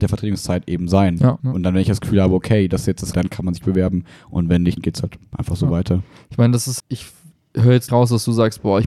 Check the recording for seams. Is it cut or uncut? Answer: cut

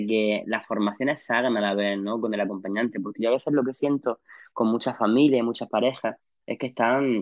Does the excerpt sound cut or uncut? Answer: uncut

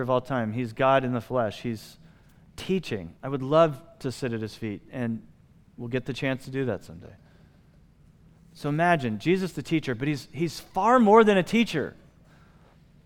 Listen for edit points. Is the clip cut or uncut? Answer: cut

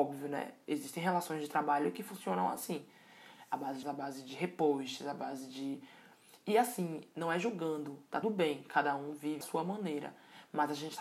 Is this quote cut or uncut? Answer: cut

